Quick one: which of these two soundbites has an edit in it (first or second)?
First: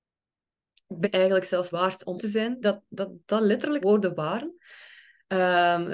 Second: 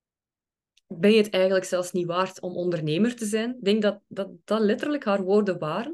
first